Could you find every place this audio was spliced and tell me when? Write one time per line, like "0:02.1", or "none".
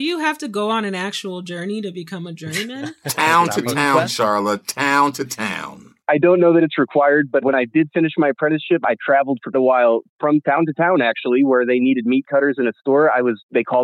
0:06.0
0:07.4
0:09.5
0:10.2